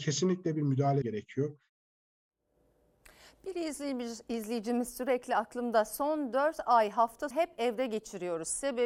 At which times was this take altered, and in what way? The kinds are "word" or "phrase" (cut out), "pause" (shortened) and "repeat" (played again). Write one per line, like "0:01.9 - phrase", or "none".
0:01.0 - word
0:07.3 - word